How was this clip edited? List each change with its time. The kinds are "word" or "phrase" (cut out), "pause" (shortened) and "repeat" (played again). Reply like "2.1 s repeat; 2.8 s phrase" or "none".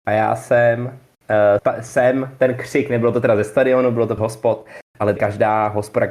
1.6 s word; 4.2 s phrase; 5.2 s word